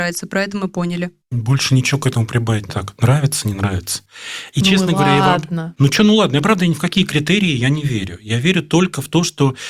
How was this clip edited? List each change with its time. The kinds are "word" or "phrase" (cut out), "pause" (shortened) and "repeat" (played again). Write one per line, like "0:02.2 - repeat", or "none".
0:01.2 - pause
0:02.7 - phrase

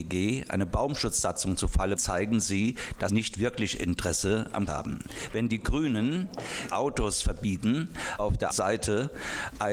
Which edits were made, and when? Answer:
0:02.0 - word
0:03.1 - word
0:04.7 - word
0:06.7 - word
0:08.2 - word
0:08.5 - word

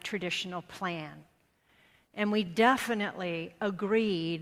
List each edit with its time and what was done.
none

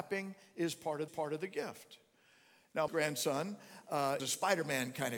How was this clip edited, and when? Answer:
0:01.1 - repeat
0:02.9 - phrase
0:04.2 - word

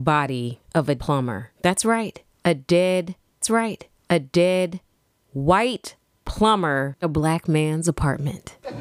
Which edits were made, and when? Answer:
0:01.0 - word
0:01.5 - pause
0:03.4 - repeat
0:07.0 - word

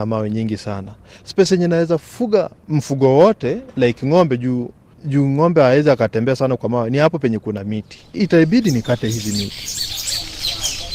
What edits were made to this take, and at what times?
none

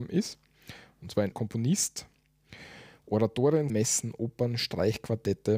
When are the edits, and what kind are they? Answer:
0:01.3 - word
0:03.7 - word

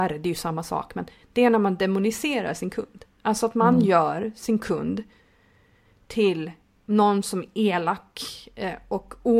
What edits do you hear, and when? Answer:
none

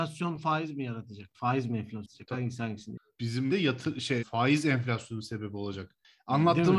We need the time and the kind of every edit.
0:03.5 - word
0:04.2 - word

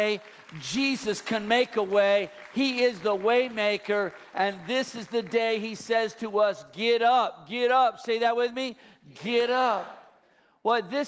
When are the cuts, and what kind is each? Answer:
none

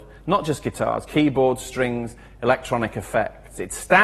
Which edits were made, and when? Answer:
none

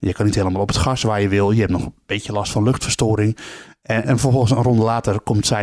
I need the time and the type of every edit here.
0:04.0 - word

